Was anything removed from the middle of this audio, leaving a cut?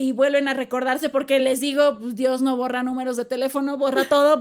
no; 0 cuts

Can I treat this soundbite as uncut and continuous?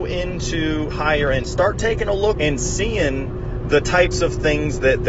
no; 3 cuts; at 0.9 s, 1.4 s, 2.4 s

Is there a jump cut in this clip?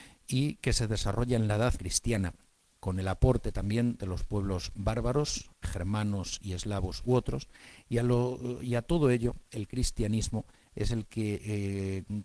yes; 2 cuts; at 1.8 s, 5.6 s

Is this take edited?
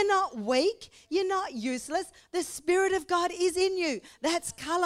no; 0 cuts

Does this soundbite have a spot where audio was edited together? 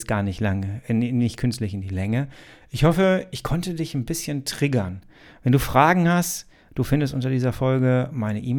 no; 0 cuts

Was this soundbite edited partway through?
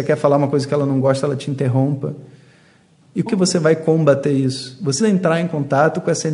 yes; 2 cuts; at 3.3 s, 5.0 s

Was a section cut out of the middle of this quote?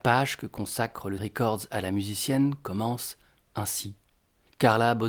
yes; 1 cut; at 1.2 s

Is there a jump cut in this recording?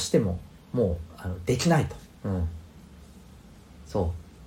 yes; 1 cut; at 2.1 s

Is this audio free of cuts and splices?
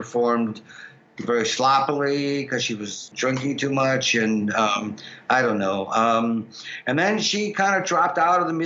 yes; 0 cuts

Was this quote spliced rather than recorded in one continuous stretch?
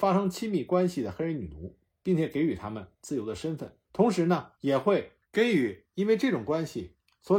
yes; 3 cuts; at 3.8 s, 4.6 s, 5.2 s

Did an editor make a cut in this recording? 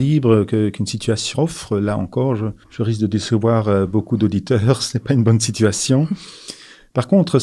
yes; 2 cuts; at 1.3 s, 2.6 s

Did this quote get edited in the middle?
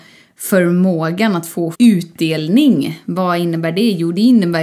yes; 1 cut; at 1.7 s

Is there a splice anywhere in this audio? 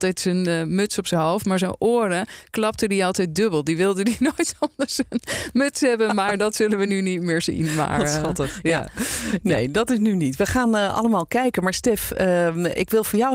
no; 0 cuts

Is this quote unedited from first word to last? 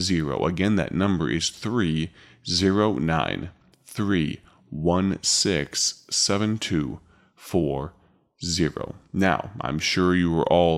yes; 0 cuts

